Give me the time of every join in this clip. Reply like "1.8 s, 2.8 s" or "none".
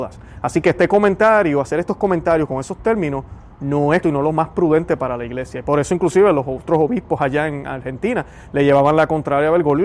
4.0 s